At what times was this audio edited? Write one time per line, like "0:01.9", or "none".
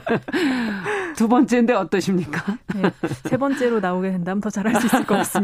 none